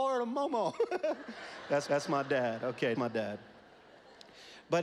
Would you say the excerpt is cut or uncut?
cut